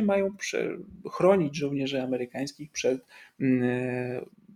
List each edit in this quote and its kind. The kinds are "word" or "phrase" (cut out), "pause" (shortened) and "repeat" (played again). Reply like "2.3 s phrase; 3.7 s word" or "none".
none